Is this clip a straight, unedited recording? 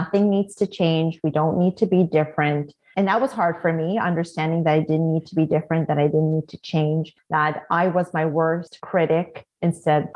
yes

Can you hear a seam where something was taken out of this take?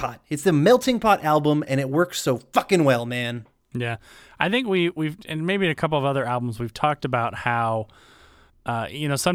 no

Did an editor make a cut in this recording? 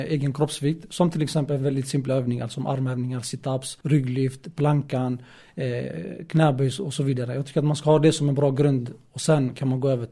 yes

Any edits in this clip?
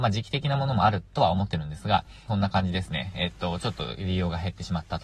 yes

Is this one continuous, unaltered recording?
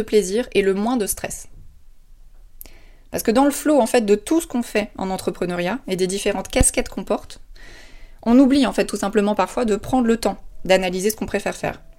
yes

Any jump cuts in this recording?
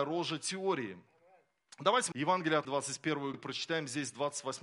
yes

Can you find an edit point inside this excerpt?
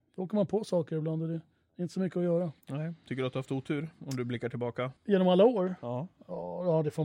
yes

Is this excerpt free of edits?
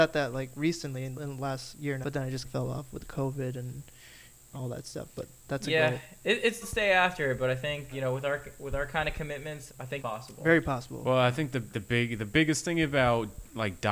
no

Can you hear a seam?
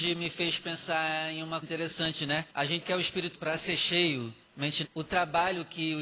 yes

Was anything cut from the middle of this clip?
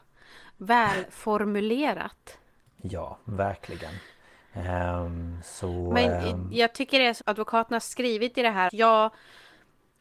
yes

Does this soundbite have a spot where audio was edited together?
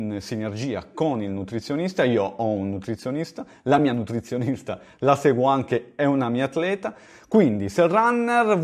no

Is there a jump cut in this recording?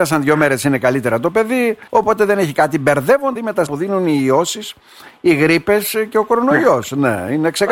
yes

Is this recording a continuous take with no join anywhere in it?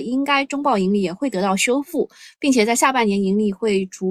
yes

